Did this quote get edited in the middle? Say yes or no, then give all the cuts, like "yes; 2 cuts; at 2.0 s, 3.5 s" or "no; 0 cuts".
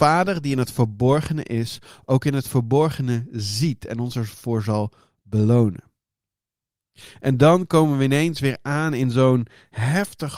no; 0 cuts